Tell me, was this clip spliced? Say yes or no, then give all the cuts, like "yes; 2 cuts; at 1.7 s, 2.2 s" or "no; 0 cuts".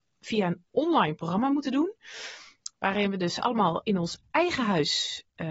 no; 0 cuts